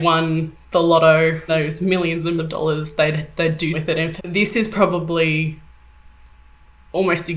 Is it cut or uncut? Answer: cut